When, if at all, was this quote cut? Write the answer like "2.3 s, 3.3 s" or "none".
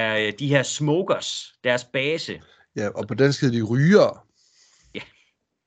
none